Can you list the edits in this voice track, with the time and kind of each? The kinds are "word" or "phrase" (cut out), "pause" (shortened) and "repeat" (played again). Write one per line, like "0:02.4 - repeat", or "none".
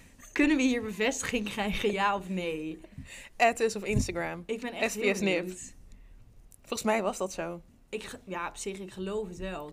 none